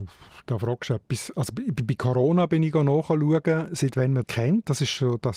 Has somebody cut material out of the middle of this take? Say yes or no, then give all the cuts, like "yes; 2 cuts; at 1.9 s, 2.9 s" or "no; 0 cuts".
yes; 1 cut; at 4.2 s